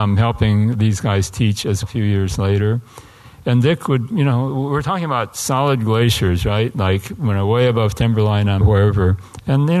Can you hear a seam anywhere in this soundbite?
yes; 2 cuts; at 1.8 s, 8.6 s

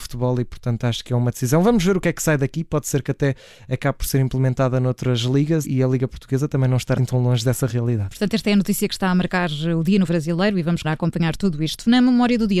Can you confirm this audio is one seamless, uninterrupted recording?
no; 4 cuts; at 5.6 s, 7.0 s, 10.1 s, 10.8 s

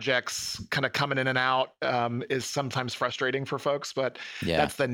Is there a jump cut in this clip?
no; 0 cuts

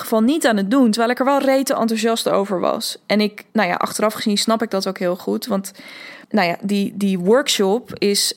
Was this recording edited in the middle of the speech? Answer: yes; 2 cuts; at 3.5 s, 6.2 s

